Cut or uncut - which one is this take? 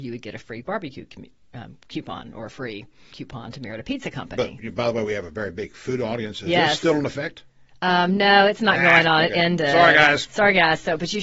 cut